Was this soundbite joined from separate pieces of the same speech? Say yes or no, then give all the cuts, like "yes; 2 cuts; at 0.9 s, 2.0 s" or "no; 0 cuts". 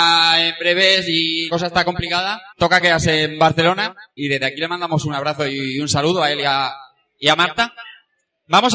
yes; 3 cuts; at 1.5 s, 2.5 s, 4.2 s